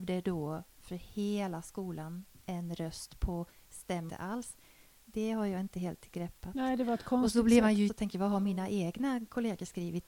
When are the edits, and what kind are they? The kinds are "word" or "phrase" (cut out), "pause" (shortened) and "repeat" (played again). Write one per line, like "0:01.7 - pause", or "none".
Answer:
0:04.1 - phrase
0:07.9 - word

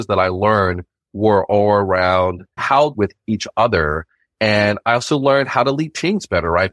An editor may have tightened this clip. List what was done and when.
0:02.6 - word
0:02.9 - phrase

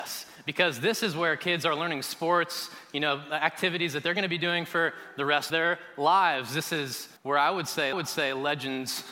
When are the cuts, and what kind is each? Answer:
0:05.5 - word
0:07.2 - pause
0:07.9 - repeat

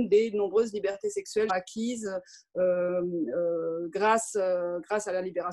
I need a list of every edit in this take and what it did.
0:01.5 - word

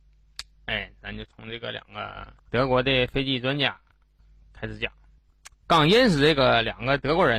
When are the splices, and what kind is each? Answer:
0:02.4 - pause
0:05.5 - pause

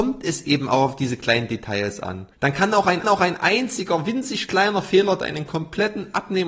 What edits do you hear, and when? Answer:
0:03.0 - repeat

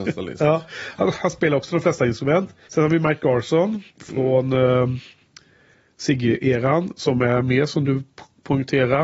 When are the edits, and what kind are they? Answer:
0:02.6 - pause
0:03.9 - pause

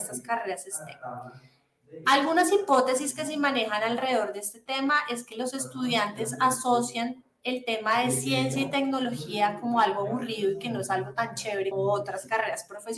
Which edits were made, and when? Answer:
0:11.7 - word

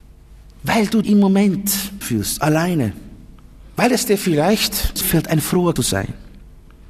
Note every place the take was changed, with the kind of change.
0:01.0 - word
0:02.0 - word
0:05.0 - word
0:05.8 - word

